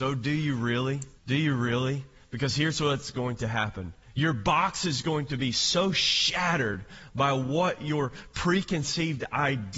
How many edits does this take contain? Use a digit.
2